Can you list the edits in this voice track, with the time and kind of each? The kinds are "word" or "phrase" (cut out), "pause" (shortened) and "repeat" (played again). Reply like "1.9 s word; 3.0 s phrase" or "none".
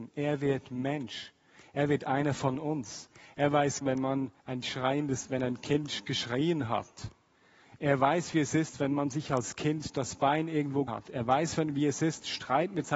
3.8 s phrase; 4.4 s pause; 10.9 s word

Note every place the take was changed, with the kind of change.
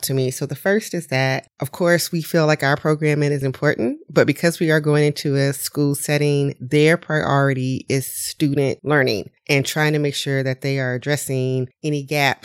9.4 s pause

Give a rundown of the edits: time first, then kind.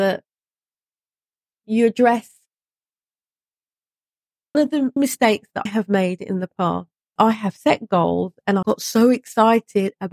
4.5 s word; 5.0 s word; 5.7 s word; 7.2 s word; 8.6 s word

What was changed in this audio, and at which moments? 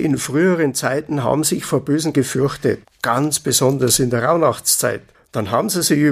2.1 s word

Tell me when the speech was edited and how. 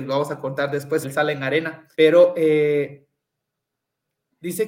1.0 s word; 1.9 s pause

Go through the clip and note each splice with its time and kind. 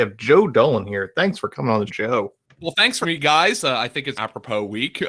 1.9 s word; 3.0 s word; 4.1 s word

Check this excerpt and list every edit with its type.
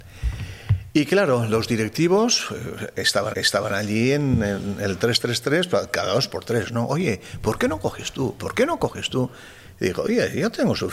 3.3 s repeat

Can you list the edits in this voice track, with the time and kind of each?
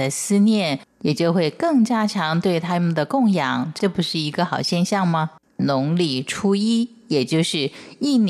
none

